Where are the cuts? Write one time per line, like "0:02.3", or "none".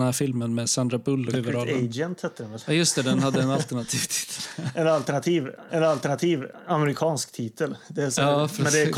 0:01.3
0:05.7